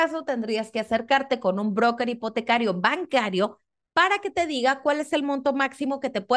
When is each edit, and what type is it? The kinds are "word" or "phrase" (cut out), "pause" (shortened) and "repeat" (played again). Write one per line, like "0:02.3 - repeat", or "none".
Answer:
none